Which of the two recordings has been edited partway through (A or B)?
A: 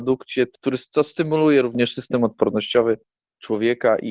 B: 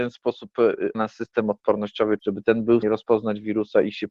B